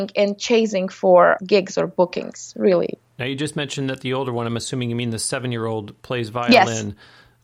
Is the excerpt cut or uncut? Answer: cut